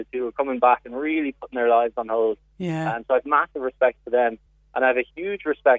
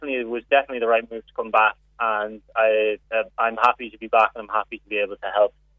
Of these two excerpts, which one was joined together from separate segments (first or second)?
second